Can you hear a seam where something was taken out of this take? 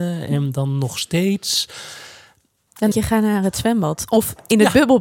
yes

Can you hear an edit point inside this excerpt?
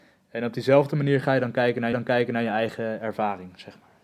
yes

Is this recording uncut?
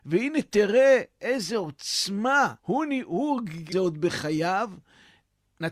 no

